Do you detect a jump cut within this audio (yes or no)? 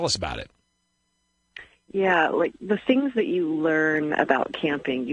no